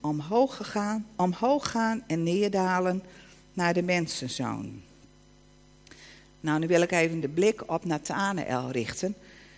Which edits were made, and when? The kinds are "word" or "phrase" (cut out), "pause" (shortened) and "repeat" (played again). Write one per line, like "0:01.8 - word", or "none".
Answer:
none